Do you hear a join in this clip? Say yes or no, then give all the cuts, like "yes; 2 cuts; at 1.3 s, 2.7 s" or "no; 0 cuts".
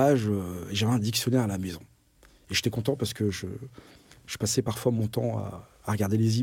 no; 0 cuts